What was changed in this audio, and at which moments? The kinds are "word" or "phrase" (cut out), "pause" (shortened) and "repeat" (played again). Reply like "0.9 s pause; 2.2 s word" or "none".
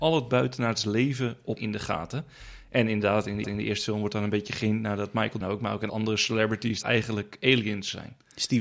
1.6 s word; 3.4 s repeat; 5.4 s word; 5.9 s word; 6.8 s phrase